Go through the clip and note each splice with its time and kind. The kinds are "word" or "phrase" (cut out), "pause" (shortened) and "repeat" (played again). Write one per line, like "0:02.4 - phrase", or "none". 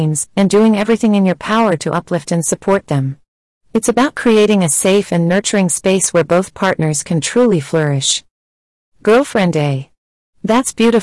none